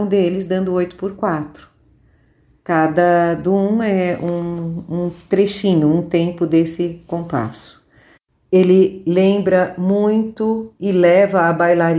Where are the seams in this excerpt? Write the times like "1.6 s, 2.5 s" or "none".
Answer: none